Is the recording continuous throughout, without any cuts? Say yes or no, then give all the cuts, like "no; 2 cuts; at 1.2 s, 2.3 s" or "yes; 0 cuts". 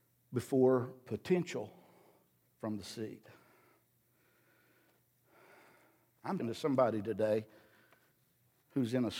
no; 2 cuts; at 2.4 s, 6.4 s